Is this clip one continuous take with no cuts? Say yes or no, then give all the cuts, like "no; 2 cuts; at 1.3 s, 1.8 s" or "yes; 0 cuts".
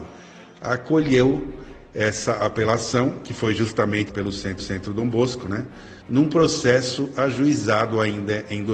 no; 3 cuts; at 4.1 s, 4.6 s, 6.0 s